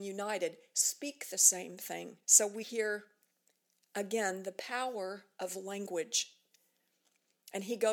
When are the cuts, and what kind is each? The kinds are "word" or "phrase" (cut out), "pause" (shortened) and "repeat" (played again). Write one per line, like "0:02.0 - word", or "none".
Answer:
0:02.2 - pause
0:02.6 - word